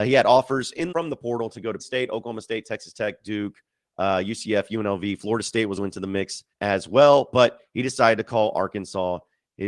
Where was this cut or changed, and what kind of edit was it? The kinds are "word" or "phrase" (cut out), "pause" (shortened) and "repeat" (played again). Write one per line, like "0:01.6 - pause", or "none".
0:00.9 - word
0:01.8 - word
0:05.8 - word
0:06.5 - pause